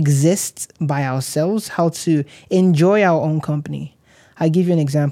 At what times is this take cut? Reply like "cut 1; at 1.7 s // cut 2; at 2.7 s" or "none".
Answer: none